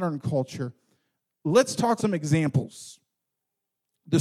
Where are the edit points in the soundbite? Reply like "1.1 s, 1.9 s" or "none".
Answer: 2.0 s